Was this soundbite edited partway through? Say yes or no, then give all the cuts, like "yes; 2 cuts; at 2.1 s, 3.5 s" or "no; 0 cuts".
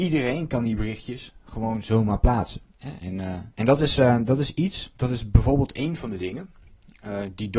yes; 2 cuts; at 2.7 s, 3.5 s